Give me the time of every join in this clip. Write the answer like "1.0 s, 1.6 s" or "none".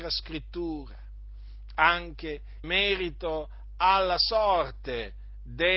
2.6 s

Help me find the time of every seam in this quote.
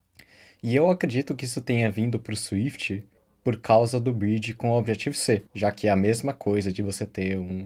3.2 s, 5.5 s

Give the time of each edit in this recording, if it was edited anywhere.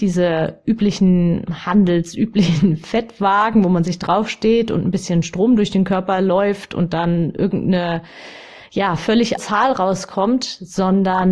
9.4 s

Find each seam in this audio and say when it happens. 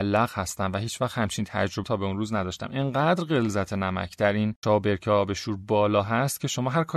1.8 s, 4.6 s

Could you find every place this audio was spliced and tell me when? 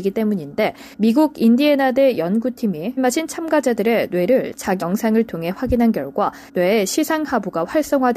0.9 s, 3.0 s, 4.8 s, 6.5 s

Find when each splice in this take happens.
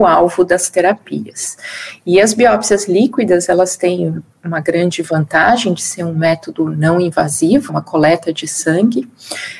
7.7 s

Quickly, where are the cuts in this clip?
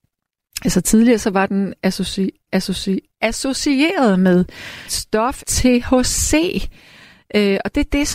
2.5 s, 4.9 s, 5.4 s

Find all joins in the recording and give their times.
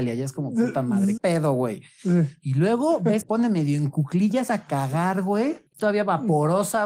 1.2 s, 3.2 s, 4.5 s, 5.7 s

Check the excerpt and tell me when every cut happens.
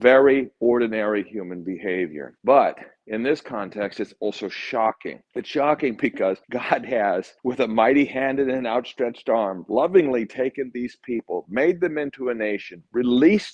2.4 s, 5.2 s, 6.4 s, 7.4 s

